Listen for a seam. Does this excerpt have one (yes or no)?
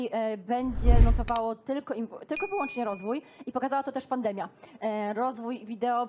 no